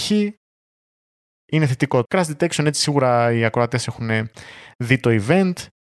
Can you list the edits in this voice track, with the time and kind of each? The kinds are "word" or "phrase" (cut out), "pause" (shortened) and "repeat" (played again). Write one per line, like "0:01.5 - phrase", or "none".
0:02.0 - word